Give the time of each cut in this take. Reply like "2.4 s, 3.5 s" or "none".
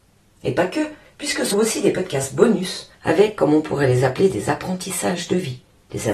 1.5 s